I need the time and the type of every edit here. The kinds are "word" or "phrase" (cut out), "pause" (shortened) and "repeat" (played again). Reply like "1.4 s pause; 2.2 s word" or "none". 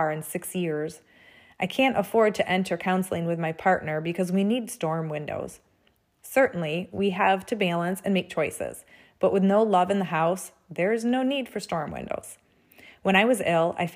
none